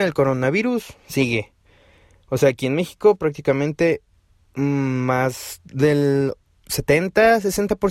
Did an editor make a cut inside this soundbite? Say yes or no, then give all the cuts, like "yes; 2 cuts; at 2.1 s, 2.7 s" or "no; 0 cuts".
no; 0 cuts